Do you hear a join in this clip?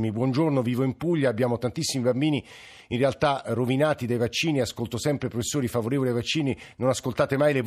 no; 0 cuts

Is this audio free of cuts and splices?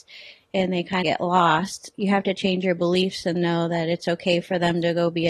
no; 2 cuts; at 1.0 s, 1.9 s

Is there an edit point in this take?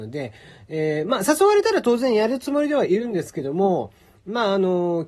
no; 0 cuts

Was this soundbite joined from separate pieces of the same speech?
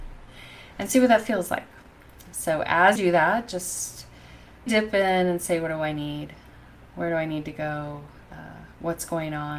yes; 3 cuts; at 3.0 s, 4.7 s, 8.2 s

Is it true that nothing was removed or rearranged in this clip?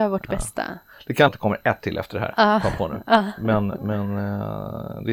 no; 1 cut; at 1.3 s

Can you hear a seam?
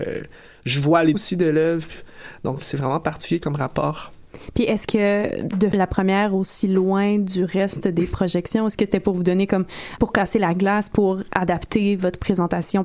yes; 4 cuts; at 1.1 s, 2.6 s, 5.7 s, 10.0 s

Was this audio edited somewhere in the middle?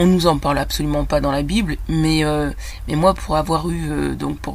no; 0 cuts

